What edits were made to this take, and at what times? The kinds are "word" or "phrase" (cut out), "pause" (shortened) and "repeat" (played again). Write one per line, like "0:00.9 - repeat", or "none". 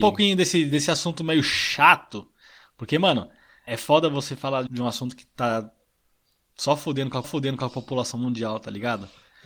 0:03.7 - word
0:04.7 - word
0:07.2 - repeat